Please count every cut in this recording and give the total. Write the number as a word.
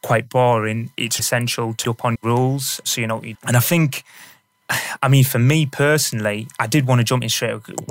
four